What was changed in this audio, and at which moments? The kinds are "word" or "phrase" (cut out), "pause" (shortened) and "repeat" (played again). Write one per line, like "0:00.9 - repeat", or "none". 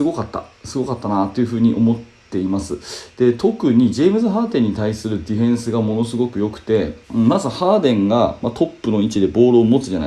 0:07.0 - pause